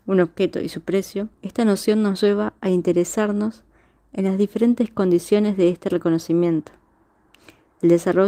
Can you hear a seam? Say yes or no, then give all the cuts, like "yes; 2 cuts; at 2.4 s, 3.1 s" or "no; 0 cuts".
yes; 1 cut; at 1.3 s